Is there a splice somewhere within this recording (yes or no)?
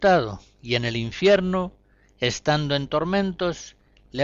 no